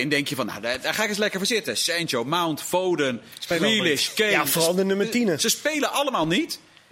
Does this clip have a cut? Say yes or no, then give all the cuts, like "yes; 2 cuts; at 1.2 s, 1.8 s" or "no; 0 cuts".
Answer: no; 0 cuts